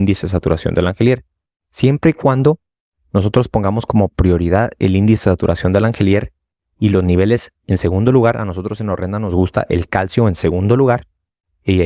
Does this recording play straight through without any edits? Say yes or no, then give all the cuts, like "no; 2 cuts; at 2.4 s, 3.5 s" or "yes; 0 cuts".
yes; 0 cuts